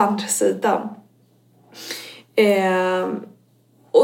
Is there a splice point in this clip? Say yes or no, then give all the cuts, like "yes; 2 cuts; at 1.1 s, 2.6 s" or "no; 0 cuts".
no; 0 cuts